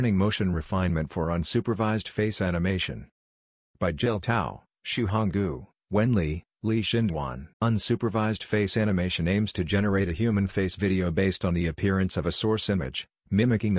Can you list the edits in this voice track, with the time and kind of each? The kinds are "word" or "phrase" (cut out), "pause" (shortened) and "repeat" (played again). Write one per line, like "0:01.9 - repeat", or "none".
0:07.5 - pause